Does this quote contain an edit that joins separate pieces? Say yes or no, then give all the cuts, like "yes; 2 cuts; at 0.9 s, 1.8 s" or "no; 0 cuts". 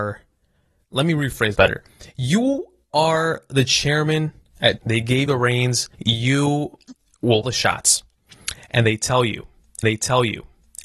yes; 6 cuts; at 1.5 s, 4.8 s, 5.3 s, 5.9 s, 7.4 s, 9.8 s